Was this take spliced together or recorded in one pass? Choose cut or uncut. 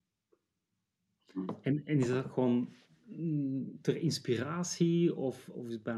uncut